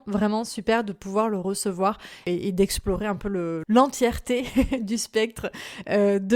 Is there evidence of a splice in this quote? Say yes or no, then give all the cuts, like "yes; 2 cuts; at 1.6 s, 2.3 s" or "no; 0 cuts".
no; 0 cuts